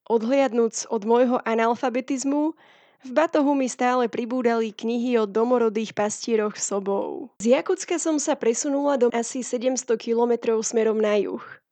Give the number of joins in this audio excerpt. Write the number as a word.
two